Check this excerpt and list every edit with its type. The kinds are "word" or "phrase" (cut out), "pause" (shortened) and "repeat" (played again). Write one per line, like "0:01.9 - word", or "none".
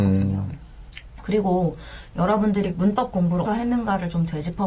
0:02.7 - word
0:03.5 - word